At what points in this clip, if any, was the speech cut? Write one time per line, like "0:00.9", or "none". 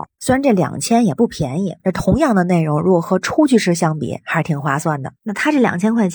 0:01.8